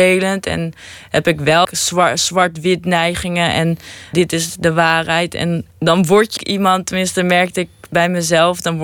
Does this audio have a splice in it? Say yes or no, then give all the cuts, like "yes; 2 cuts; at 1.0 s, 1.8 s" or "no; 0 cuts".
yes; 4 cuts; at 1.6 s, 4.1 s, 5.7 s, 6.4 s